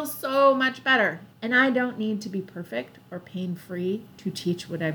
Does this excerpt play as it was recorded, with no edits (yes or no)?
no